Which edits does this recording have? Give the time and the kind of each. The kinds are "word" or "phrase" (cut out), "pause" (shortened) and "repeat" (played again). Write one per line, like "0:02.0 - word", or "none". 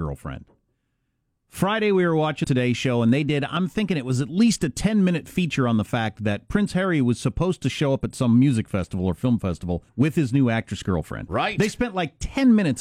0:02.4 - word
0:09.9 - pause